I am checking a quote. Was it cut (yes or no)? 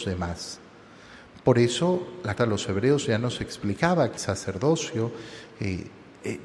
yes